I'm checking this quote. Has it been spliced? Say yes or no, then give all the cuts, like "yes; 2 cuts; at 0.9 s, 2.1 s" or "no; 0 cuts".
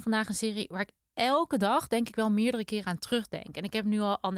no; 0 cuts